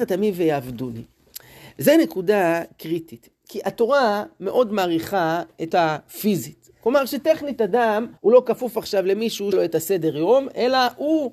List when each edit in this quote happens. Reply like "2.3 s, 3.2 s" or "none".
5.7 s, 8.2 s, 9.5 s